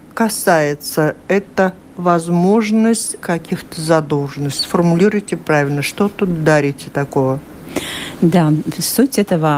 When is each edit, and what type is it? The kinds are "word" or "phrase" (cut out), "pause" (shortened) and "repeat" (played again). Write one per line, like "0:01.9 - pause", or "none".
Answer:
0:03.2 - word